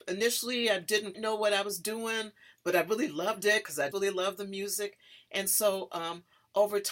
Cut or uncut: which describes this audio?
cut